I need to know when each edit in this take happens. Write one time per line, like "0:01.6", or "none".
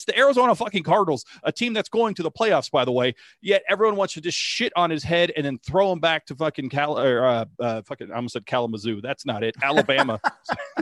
none